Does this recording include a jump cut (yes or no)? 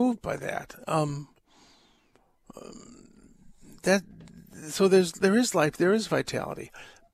no